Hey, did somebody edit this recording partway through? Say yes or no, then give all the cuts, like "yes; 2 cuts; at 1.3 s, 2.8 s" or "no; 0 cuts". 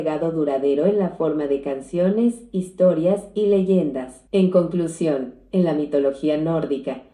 yes; 1 cut; at 4.3 s